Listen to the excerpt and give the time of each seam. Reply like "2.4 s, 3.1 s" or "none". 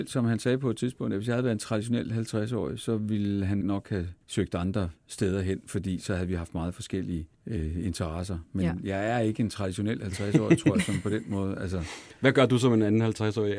3.6 s, 4.2 s, 7.3 s